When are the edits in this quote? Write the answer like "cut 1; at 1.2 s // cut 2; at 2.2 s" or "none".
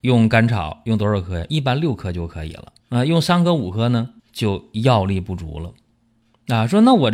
cut 1; at 2.8 s // cut 2; at 4.2 s